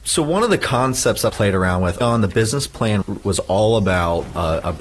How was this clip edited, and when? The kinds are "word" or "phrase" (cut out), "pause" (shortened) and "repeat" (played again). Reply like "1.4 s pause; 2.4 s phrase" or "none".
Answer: 1.3 s word; 2.0 s word; 3.0 s word

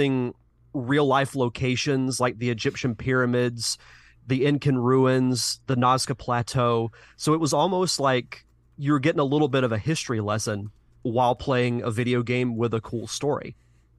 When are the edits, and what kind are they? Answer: none

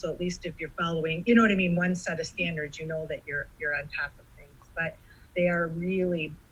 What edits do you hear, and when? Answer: 5.3 s pause

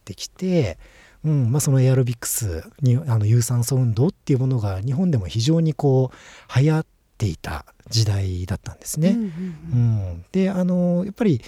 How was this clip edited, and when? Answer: none

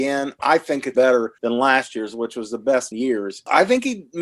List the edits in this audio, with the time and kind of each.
0.9 s word; 1.4 s pause; 2.9 s word

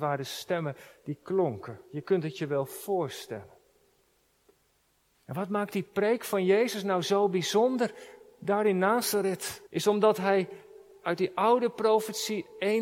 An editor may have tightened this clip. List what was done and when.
9.7 s pause

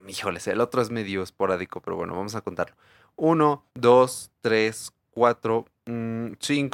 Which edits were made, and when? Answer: 3.7 s pause; 5.8 s pause

